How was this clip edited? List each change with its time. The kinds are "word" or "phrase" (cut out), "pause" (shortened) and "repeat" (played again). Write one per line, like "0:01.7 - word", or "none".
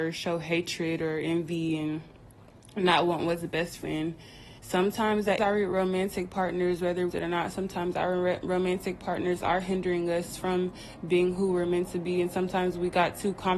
0:03.8 - word
0:04.6 - pause
0:05.4 - word
0:07.1 - phrase